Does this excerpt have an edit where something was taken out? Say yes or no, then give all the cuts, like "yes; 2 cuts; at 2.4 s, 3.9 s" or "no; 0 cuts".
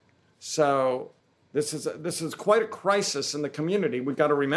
yes; 1 cut; at 1.2 s